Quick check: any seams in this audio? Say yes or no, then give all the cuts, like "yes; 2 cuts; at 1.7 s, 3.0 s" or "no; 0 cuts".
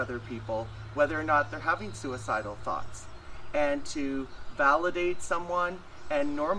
no; 0 cuts